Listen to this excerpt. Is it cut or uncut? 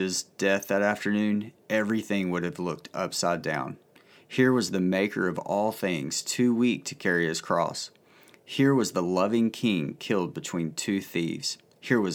uncut